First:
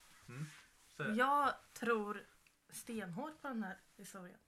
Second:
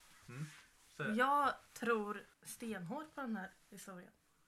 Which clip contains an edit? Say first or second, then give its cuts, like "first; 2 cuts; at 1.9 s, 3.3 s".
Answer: second; 1 cut; at 2.3 s